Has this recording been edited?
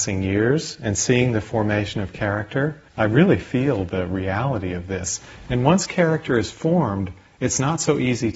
yes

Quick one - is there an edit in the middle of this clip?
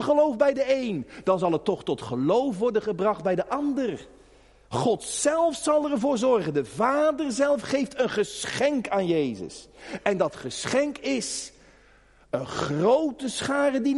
no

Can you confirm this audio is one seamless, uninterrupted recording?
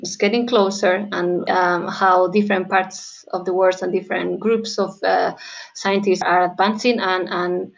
no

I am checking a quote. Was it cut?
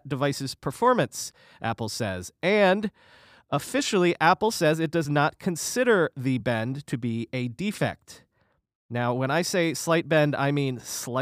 no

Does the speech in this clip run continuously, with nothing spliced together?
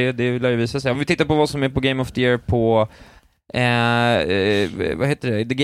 yes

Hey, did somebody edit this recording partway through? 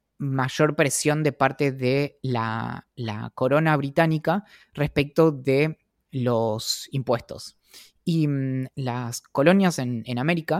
yes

